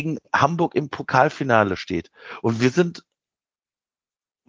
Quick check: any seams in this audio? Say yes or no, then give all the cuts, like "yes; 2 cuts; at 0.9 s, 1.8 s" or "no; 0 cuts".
no; 0 cuts